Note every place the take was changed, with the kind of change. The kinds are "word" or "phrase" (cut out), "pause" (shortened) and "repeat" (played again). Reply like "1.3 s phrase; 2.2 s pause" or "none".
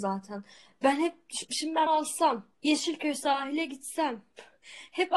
1.4 s word; 1.9 s word; 2.5 s pause

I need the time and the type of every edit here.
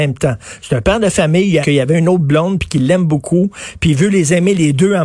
1.6 s phrase

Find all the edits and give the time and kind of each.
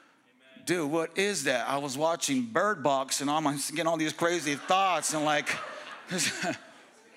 none

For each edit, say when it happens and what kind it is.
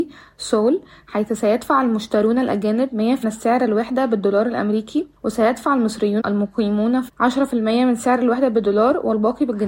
3.2 s word; 5.2 s pause; 6.2 s word; 7.1 s word

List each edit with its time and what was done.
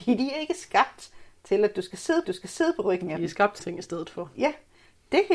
2.2 s repeat; 3.6 s phrase

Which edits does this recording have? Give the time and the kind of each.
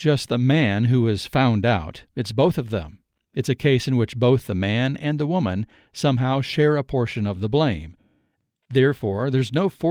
none

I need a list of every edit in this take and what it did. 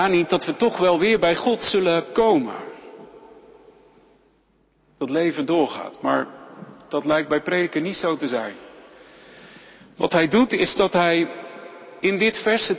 none

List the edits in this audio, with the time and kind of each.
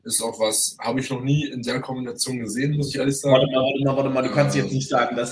none

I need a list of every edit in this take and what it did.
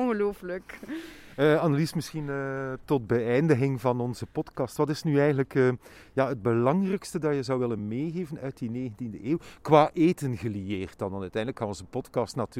none

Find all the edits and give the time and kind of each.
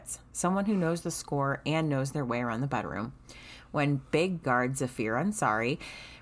4.4 s phrase

